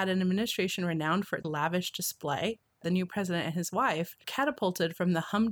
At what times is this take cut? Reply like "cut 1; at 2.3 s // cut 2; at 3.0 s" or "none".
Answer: cut 1; at 1.4 s // cut 2; at 4.2 s